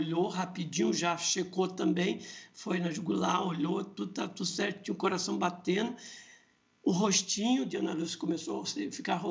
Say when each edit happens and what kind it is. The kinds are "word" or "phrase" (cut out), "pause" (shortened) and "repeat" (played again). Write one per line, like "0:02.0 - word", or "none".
none